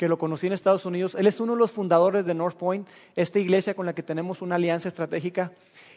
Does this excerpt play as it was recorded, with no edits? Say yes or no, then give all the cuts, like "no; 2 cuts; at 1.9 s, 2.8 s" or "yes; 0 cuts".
yes; 0 cuts